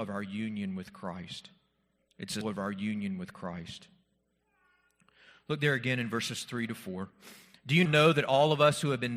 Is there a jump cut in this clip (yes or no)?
yes